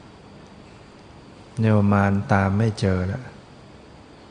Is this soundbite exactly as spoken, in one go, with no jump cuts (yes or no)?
yes